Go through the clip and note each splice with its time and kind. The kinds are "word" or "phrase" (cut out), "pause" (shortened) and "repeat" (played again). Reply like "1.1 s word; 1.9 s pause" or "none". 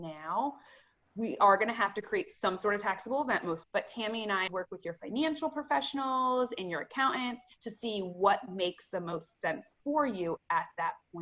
3.6 s word; 4.5 s word; 7.5 s pause; 9.8 s pause